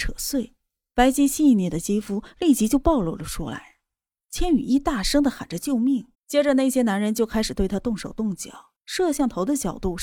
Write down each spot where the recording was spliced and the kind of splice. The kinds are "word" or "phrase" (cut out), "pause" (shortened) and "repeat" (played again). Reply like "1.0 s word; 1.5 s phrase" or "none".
6.1 s pause; 8.8 s pause